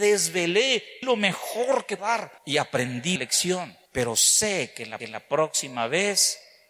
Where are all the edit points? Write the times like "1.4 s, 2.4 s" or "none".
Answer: 1.0 s, 2.0 s, 2.4 s, 3.2 s, 3.9 s, 5.0 s